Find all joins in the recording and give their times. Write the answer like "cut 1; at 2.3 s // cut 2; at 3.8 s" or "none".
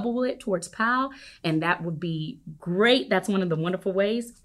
none